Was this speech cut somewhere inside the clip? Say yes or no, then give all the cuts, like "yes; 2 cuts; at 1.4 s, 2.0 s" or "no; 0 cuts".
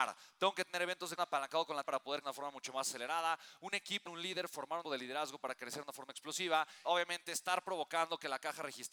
yes; 6 cuts; at 1.2 s, 1.8 s, 2.2 s, 4.1 s, 4.8 s, 6.8 s